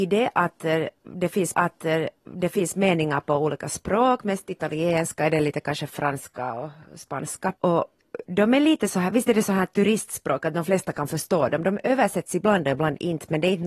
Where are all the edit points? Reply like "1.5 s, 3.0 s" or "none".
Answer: 1.5 s, 7.6 s